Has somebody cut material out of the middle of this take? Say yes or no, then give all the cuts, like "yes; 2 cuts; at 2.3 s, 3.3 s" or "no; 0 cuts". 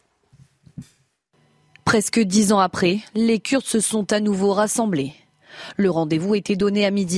no; 0 cuts